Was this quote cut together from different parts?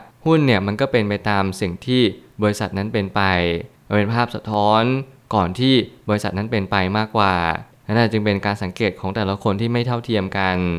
no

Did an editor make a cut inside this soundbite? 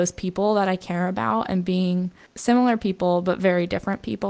no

